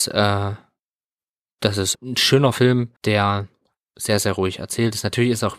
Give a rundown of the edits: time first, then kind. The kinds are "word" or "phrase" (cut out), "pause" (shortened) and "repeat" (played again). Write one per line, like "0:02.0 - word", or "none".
0:01.0 - pause
0:01.9 - word
0:03.0 - pause